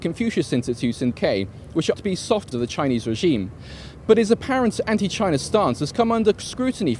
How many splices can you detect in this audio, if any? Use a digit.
3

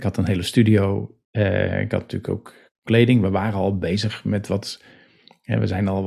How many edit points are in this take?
1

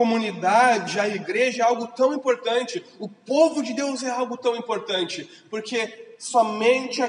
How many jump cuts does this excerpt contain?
0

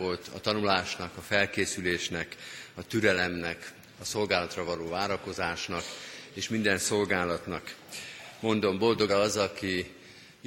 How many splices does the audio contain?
1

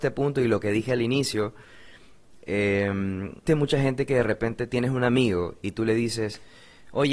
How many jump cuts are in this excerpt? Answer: 1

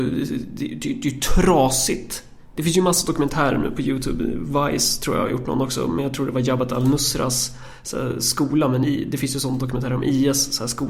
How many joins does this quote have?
0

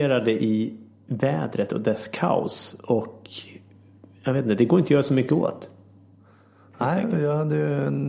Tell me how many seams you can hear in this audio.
0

